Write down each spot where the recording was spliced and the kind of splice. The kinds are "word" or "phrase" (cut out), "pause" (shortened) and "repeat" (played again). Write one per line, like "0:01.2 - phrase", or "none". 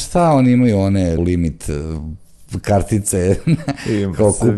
0:01.2 - word